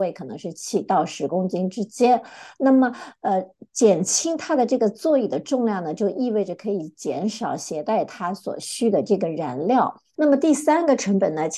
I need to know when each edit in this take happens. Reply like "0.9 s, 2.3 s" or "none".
3.7 s